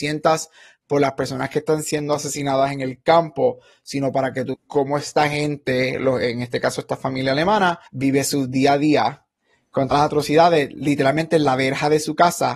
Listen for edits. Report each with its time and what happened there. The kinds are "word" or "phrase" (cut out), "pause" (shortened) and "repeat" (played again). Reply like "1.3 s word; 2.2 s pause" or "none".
4.5 s word; 7.9 s pause; 9.9 s word